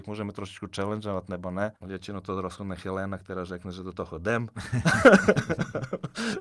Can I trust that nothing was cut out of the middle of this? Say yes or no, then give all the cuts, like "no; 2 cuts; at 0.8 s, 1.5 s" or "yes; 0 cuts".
no; 1 cut; at 1.8 s